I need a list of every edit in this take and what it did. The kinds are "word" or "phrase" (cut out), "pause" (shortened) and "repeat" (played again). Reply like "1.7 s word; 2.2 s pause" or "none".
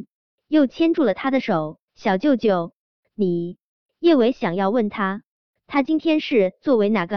1.9 s pause

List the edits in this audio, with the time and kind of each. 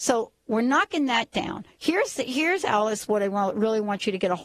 none

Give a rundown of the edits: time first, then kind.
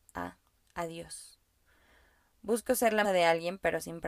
3.0 s word

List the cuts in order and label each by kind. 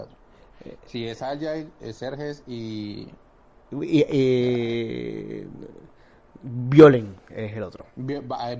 none

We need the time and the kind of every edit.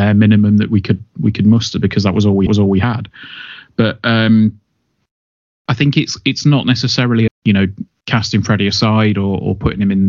2.5 s repeat; 7.3 s word; 7.9 s pause

